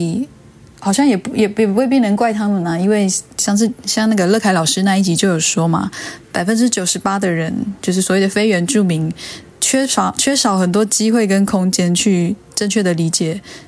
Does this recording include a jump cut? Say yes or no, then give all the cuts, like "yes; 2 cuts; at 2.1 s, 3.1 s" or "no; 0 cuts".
yes; 1 cut; at 9.5 s